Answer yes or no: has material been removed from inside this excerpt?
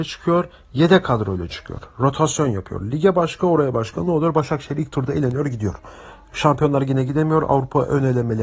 no